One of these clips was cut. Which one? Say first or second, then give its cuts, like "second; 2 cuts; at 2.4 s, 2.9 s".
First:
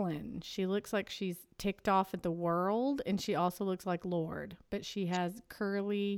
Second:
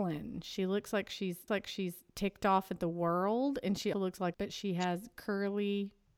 second; 3 cuts; at 1.5 s, 3.9 s, 4.3 s